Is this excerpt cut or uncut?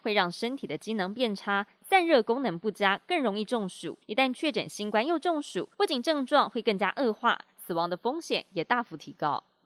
cut